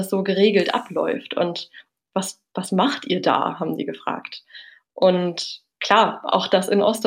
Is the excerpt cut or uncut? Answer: uncut